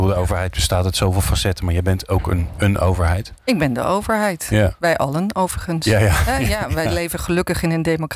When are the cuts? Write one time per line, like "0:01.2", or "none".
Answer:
none